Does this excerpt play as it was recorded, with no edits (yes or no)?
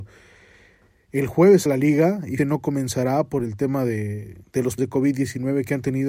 no